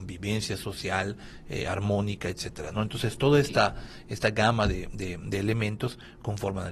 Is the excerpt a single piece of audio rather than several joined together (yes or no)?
yes